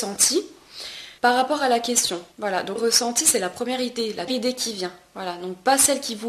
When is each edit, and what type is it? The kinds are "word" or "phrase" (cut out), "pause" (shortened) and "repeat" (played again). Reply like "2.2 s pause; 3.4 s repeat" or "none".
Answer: 1.2 s pause; 2.3 s pause; 2.8 s phrase; 4.3 s phrase